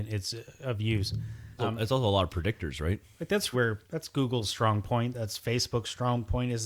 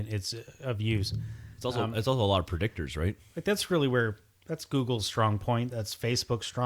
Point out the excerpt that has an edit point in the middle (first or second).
first